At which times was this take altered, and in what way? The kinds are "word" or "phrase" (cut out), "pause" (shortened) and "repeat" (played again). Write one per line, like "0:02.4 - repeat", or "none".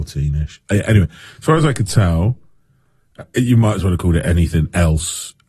none

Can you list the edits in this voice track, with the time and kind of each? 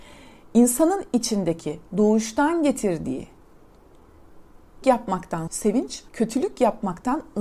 0:01.9 - pause
0:04.8 - word
0:05.5 - word
0:06.1 - pause

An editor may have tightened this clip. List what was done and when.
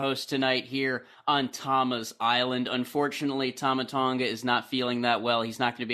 none

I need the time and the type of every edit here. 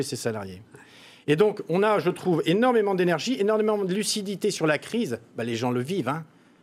none

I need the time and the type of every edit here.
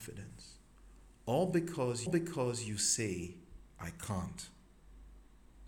0:02.1 - repeat
0:03.7 - pause

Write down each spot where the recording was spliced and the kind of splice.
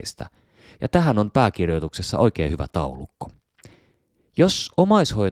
none

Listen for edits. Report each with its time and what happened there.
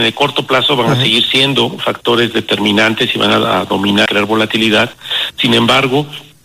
0:04.1 - phrase

